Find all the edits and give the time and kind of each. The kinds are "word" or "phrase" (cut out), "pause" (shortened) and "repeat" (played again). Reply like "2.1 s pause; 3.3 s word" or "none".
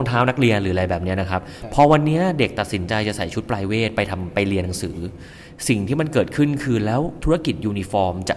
none